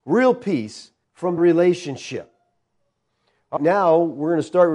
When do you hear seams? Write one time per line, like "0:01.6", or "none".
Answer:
0:01.0
0:01.4
0:03.6